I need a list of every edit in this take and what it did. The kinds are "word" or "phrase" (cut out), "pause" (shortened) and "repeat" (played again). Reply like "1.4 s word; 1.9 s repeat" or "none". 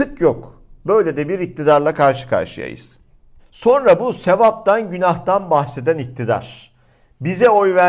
none